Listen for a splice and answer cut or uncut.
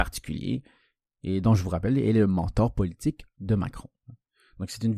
uncut